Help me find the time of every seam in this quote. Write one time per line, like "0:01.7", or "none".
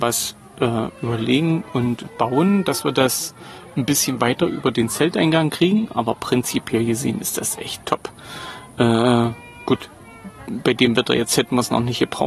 none